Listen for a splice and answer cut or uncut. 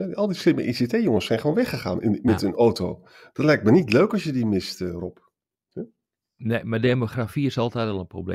uncut